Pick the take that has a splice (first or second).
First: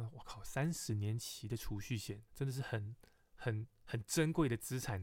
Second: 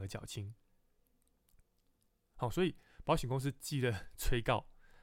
first